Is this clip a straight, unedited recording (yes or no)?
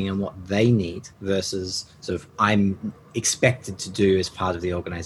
no